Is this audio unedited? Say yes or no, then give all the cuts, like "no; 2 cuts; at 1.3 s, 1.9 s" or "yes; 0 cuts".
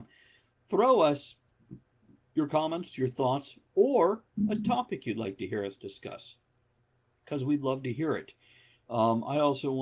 yes; 0 cuts